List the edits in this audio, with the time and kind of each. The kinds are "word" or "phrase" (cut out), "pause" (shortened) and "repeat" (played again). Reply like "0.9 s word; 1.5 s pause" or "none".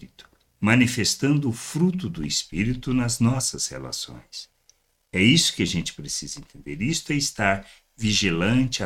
none